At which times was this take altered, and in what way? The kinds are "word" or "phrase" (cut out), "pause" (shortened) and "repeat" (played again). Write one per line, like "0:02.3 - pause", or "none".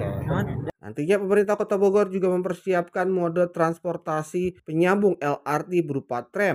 none